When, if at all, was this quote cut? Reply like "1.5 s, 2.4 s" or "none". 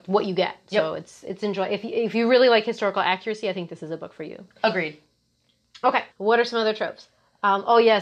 6.1 s